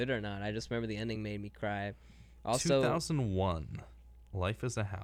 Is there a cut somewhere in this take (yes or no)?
no